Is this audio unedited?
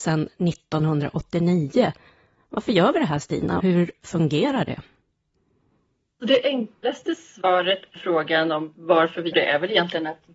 no; 3 cuts; at 3.6 s, 8.0 s, 9.3 s

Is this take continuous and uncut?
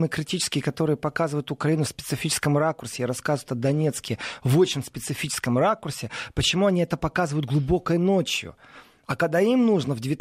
yes; 0 cuts

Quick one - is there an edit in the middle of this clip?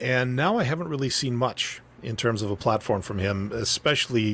no; 0 cuts

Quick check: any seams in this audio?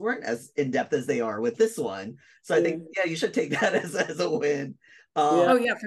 no; 0 cuts

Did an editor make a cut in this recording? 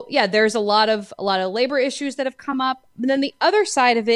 no; 0 cuts

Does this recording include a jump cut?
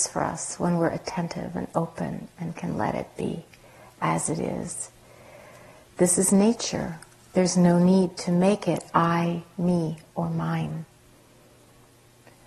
no; 0 cuts

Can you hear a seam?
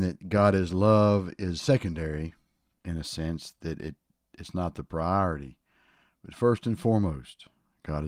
no; 0 cuts

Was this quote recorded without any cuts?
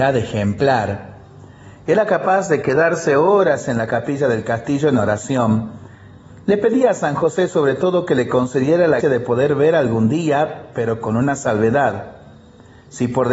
no; 1 cut; at 9.0 s

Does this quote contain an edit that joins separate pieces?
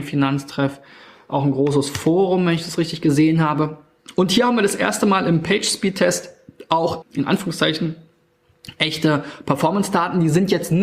yes; 1 cut; at 7.0 s

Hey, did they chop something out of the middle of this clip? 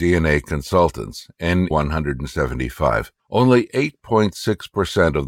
yes; 2 cuts; at 1.7 s, 3.2 s

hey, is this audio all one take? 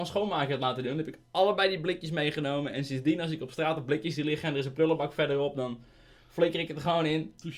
yes; 0 cuts

